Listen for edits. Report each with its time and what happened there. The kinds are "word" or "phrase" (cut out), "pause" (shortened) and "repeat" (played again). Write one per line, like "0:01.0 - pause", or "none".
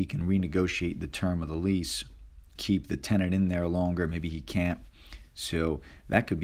0:02.6 - word